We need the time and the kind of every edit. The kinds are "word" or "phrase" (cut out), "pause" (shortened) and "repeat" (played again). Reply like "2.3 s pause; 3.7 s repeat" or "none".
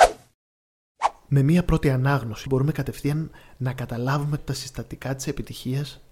2.5 s word; 4.4 s word